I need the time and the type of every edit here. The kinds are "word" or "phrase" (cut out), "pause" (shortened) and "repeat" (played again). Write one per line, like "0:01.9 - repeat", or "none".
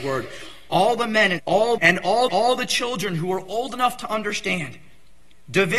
0:01.4 - word
0:01.8 - phrase
0:02.3 - repeat